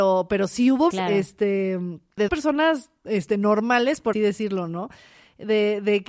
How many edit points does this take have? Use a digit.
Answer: 4